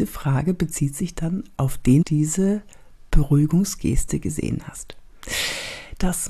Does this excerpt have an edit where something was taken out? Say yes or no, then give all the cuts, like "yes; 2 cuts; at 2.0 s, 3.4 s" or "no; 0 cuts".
yes; 1 cut; at 2.0 s